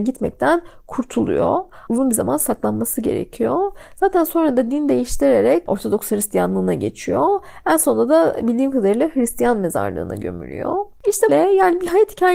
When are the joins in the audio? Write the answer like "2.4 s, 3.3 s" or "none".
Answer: 11.3 s